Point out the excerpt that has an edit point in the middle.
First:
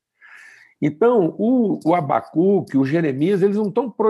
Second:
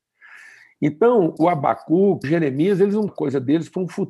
second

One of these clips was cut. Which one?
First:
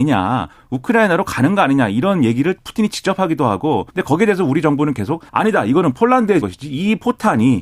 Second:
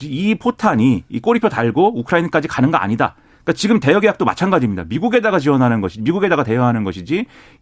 first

